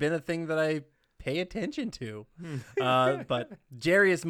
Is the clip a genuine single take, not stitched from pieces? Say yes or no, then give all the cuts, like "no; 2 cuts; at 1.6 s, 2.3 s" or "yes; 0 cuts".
yes; 0 cuts